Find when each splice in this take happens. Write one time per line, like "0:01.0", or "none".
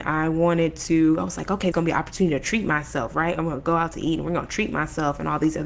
0:01.7